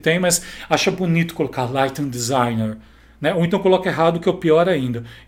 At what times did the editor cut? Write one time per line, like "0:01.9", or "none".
none

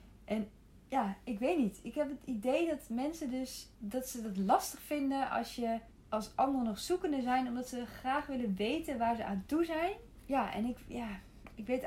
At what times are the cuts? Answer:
0:03.7
0:05.9

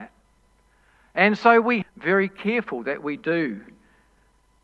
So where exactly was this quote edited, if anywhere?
0:01.8

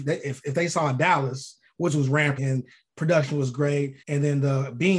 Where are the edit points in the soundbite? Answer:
0:02.4
0:04.0

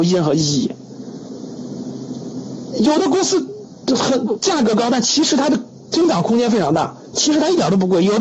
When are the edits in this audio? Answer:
none

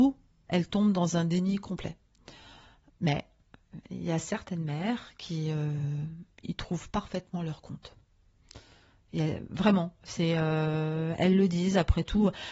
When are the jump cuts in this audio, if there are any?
none

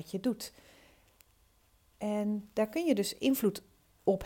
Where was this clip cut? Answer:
none

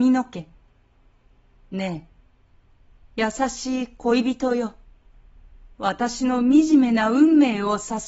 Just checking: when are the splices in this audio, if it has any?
0:05.7

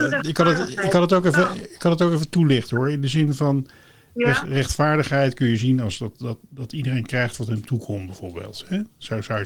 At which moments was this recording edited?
none

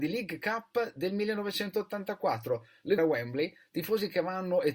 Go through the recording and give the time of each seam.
0:03.0

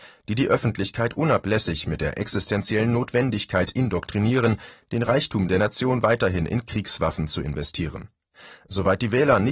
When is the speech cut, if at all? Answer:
none

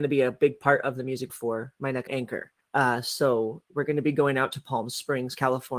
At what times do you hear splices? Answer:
0:01.3
0:02.1
0:02.6

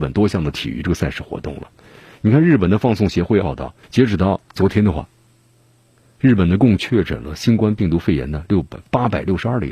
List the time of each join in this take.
0:03.4
0:03.8
0:04.5

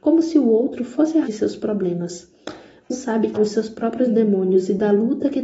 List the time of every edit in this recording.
0:01.2
0:02.9
0:03.3

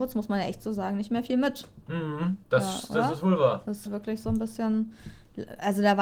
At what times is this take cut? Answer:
0:02.4
0:03.9

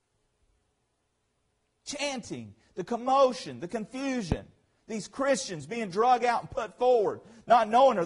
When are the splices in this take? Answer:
none

